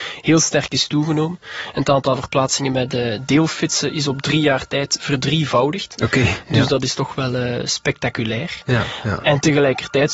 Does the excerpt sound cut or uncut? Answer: uncut